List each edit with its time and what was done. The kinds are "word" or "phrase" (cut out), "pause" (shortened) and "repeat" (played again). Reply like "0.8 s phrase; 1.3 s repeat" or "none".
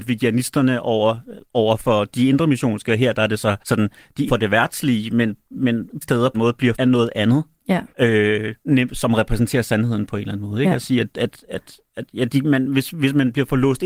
1.4 s pause; 3.6 s pause; 4.3 s phrase; 6.0 s word; 6.3 s phrase; 6.7 s word; 7.9 s pause; 11.9 s pause

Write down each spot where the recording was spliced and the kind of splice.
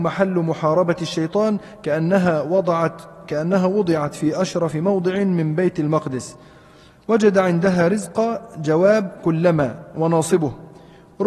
none

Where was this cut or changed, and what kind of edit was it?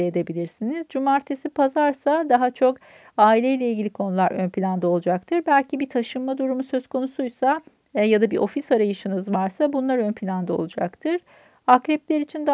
none

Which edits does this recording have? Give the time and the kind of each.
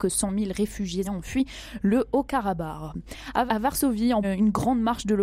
1.0 s word; 3.5 s word; 4.2 s word

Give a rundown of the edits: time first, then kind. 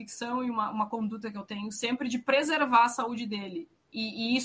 none

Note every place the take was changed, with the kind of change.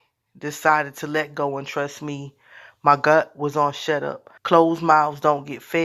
4.4 s pause

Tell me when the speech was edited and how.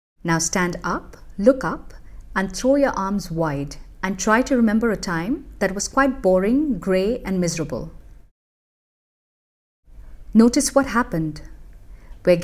none

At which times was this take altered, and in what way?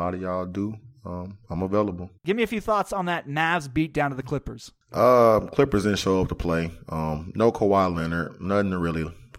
2.2 s pause; 4.8 s pause

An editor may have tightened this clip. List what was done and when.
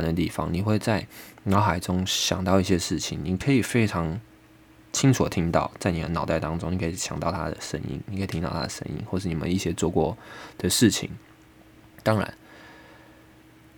none

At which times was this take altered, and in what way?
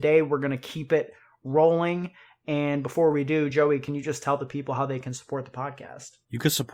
none

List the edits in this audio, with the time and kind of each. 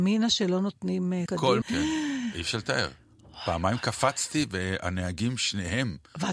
1.3 s word; 1.6 s word

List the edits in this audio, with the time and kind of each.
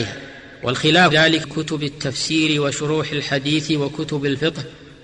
1.1 s word; 1.4 s phrase

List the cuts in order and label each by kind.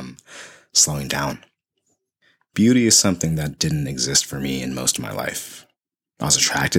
none

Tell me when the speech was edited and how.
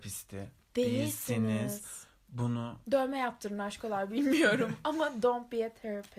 none

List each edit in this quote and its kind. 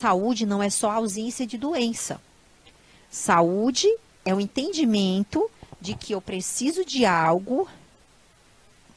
none

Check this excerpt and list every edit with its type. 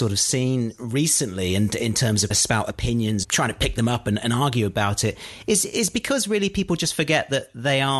2.3 s phrase; 3.2 s phrase

